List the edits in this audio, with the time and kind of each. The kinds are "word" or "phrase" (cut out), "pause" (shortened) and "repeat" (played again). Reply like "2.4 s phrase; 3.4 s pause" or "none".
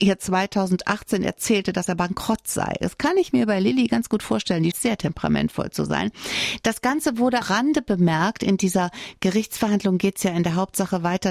4.7 s word; 7.4 s phrase